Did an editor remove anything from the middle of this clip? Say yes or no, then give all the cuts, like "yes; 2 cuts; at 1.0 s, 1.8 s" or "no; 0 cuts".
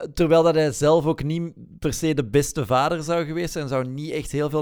no; 0 cuts